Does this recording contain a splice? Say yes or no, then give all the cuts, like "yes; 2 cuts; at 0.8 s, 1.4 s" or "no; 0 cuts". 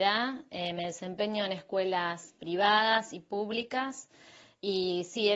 no; 0 cuts